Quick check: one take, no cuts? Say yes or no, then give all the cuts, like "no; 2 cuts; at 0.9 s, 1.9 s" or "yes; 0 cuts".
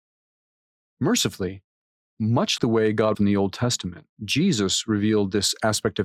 no; 3 cuts; at 2.6 s, 3.1 s, 4.1 s